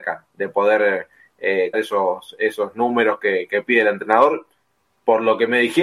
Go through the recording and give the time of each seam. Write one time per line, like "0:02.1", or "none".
0:01.7